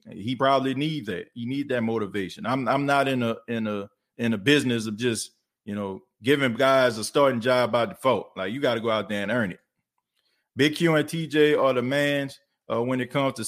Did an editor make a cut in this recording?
no; 0 cuts

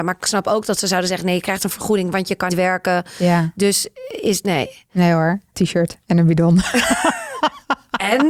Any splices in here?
yes; 3 cuts; at 2.5 s, 4.4 s, 5.5 s

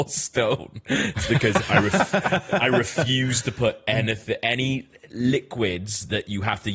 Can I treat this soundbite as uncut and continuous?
yes; 0 cuts

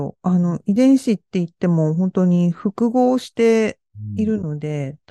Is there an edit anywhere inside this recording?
no; 0 cuts

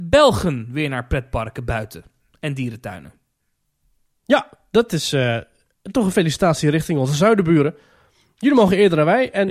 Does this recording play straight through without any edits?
yes; 0 cuts

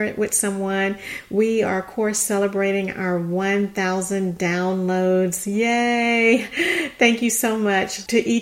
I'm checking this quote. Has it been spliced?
no; 0 cuts

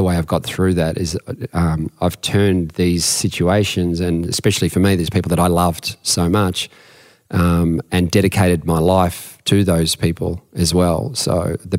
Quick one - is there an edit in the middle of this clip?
no; 0 cuts

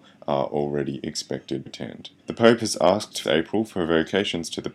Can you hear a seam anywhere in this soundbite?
yes; 3 cuts; at 1.7 s, 2.2 s, 3.2 s

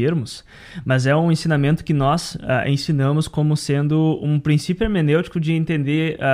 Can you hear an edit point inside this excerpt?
no; 0 cuts

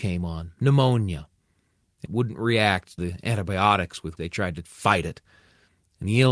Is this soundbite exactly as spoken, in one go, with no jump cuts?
no; 3 cuts; at 2.1 s, 3.0 s, 4.2 s

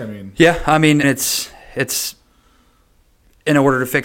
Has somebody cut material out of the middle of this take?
yes; 1 cut; at 1.0 s

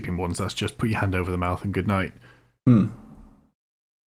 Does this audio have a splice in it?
no; 0 cuts

